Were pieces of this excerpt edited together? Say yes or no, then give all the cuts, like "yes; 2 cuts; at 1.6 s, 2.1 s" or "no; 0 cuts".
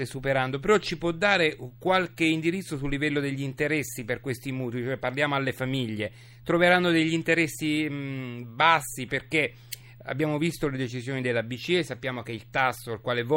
no; 0 cuts